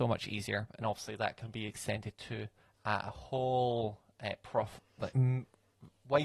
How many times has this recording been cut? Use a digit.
2